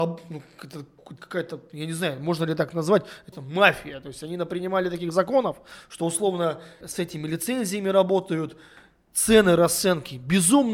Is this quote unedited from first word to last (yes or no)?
no